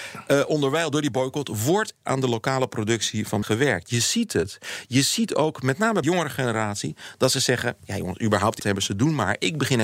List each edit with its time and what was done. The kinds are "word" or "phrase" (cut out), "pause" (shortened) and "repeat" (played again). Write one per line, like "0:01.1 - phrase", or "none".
0:02.0 - word
0:03.4 - word
0:06.0 - word
0:08.6 - word